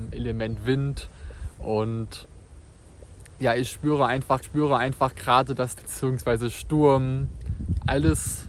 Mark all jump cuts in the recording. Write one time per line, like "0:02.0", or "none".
0:04.4
0:05.8